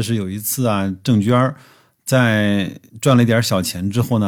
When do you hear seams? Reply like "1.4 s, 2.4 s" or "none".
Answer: 2.9 s